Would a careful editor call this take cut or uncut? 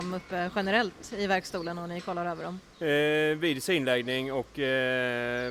cut